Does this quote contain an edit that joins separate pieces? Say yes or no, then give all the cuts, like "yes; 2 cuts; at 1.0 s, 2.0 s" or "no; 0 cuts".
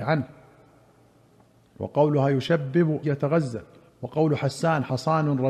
yes; 2 cuts; at 3.0 s, 3.9 s